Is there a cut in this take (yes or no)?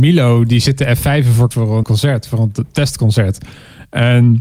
yes